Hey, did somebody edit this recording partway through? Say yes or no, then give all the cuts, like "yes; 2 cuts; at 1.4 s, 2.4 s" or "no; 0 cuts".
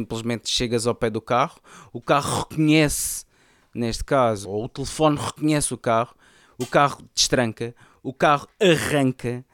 yes; 1 cut; at 4.4 s